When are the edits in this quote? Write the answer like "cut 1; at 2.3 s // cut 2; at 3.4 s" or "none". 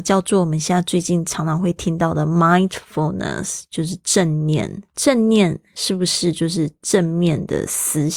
cut 1; at 4.9 s